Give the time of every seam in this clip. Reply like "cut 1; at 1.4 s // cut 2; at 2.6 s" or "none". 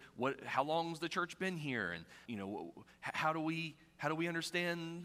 cut 1; at 2.3 s